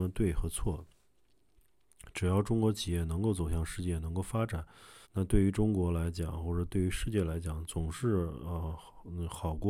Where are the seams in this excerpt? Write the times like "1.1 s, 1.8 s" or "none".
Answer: 5.0 s